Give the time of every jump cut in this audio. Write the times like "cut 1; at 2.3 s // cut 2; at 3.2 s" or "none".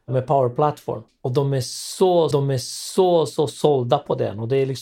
cut 1; at 1.1 s // cut 2; at 2.3 s